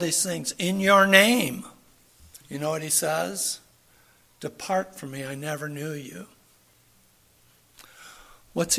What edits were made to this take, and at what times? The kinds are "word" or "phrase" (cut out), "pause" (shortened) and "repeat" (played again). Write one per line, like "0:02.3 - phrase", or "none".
0:02.4 - pause